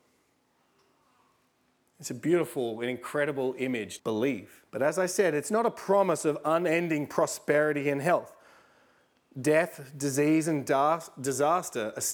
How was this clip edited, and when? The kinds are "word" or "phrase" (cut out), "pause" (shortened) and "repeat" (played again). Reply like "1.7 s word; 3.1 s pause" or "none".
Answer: 4.0 s phrase; 4.7 s pause